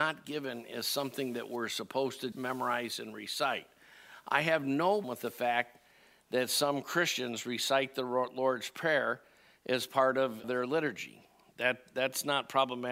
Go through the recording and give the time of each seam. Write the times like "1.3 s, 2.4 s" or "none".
2.3 s, 5.0 s, 10.4 s